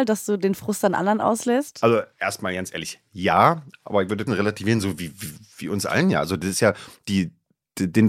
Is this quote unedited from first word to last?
no; 2 cuts; at 2.1 s, 4.3 s

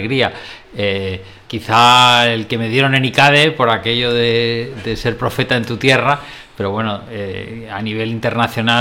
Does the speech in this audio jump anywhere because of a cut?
yes; 1 cut; at 1.5 s

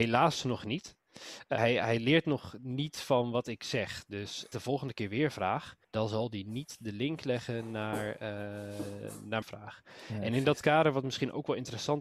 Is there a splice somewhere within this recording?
yes; 4 cuts; at 1.6 s, 4.5 s, 5.8 s, 9.4 s

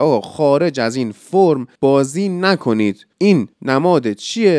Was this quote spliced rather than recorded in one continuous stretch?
yes; 2 cuts; at 1.8 s, 3.5 s

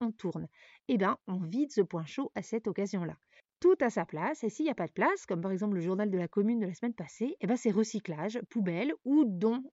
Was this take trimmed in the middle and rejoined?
no; 0 cuts

